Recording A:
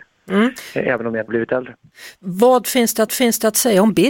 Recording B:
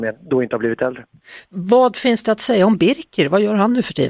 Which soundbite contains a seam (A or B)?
A